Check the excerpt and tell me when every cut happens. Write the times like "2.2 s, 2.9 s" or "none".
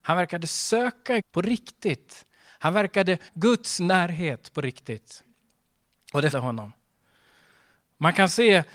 1.2 s, 3.3 s, 6.3 s